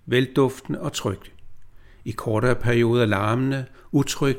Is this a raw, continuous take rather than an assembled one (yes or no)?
yes